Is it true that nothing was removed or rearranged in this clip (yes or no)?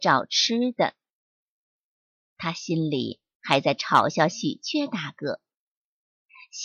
yes